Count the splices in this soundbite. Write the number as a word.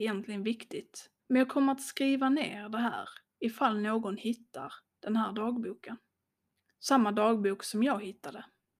two